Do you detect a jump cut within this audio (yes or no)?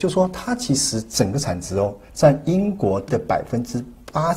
yes